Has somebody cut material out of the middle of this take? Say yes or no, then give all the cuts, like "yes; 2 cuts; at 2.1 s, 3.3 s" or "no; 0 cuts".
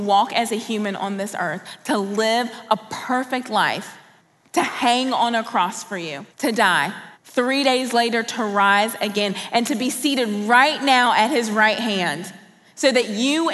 yes; 3 cuts; at 4.2 s, 6.3 s, 7.1 s